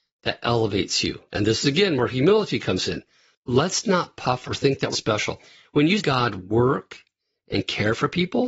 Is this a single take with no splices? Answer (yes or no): no